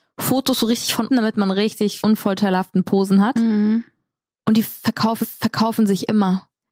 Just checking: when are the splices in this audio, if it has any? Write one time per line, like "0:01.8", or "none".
0:01.1
0:02.0
0:05.2